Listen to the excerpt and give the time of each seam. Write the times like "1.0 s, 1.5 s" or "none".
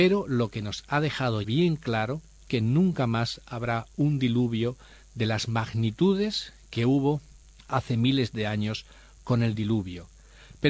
1.4 s, 2.5 s, 7.4 s